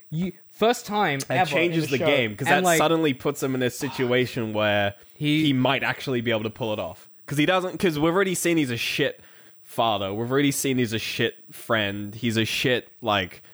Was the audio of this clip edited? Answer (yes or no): no